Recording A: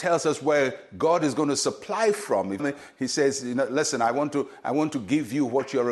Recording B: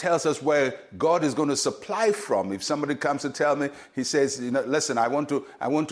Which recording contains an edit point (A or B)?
A